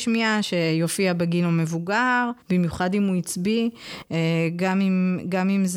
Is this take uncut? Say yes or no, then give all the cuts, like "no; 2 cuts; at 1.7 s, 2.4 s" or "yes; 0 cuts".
no; 1 cut; at 2.4 s